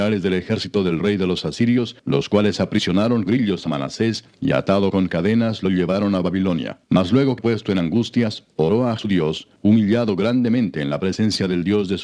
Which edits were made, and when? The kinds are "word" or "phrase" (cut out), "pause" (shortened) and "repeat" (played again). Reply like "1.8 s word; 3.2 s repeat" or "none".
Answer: 2.0 s pause; 3.3 s word; 4.3 s pause; 6.8 s pause; 7.4 s word; 9.0 s word; 9.6 s pause

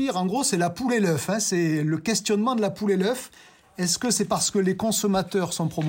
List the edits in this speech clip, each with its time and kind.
none

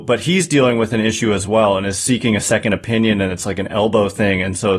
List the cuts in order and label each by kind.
none

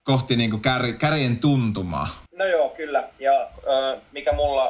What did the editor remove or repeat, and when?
2.3 s pause

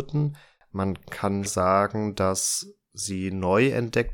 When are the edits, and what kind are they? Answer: 1.5 s word

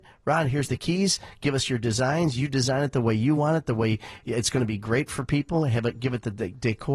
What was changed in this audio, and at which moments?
none

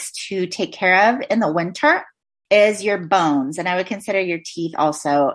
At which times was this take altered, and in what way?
none

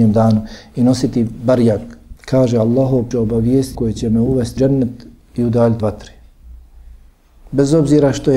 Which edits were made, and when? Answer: 2.2 s pause; 3.1 s word; 3.7 s phrase; 4.6 s word; 5.8 s word

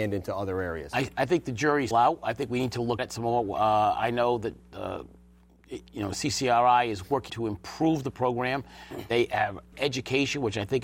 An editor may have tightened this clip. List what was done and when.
1.9 s word; 3.0 s word; 7.3 s word; 9.7 s word

